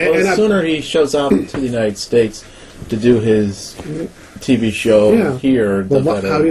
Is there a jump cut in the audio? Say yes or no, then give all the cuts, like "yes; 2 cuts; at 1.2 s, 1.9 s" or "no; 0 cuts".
no; 0 cuts